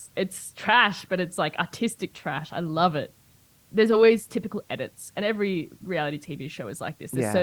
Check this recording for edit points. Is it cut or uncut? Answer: uncut